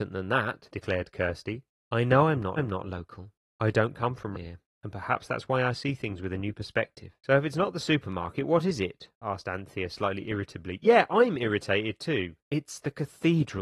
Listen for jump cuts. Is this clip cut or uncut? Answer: cut